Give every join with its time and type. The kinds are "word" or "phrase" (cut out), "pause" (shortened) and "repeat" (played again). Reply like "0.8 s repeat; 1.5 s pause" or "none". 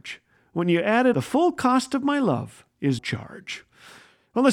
1.1 s phrase; 3.0 s word